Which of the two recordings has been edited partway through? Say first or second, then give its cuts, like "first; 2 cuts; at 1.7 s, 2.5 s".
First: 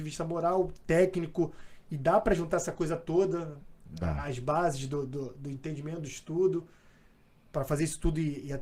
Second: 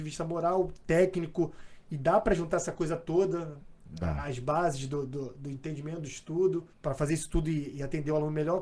second; 1 cut; at 6.7 s